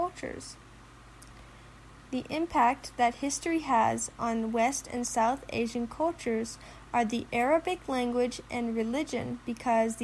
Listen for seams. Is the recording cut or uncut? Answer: uncut